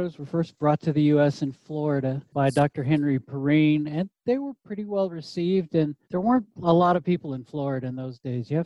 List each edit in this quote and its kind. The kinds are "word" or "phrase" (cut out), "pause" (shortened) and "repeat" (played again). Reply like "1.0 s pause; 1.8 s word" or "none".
2.3 s pause; 6.0 s pause